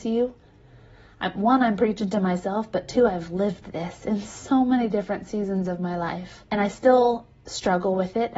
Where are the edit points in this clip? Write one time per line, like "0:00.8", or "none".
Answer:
0:06.5